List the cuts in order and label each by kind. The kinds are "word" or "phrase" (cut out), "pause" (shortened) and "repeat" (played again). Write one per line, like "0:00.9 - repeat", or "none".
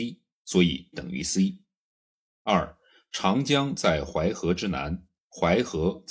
0:00.9 - word